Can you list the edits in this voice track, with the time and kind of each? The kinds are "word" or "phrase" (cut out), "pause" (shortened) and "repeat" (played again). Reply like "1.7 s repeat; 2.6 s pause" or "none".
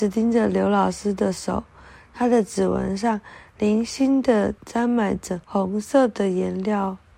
4.6 s pause; 5.4 s pause